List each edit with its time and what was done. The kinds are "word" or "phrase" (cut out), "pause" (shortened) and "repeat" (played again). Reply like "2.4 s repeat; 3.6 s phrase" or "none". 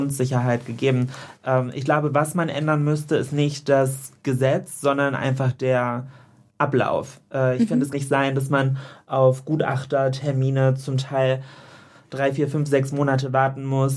7.9 s word